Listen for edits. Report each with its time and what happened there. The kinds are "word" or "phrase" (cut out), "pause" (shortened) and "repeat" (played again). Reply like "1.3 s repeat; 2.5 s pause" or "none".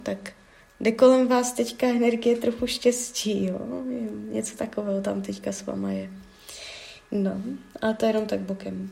none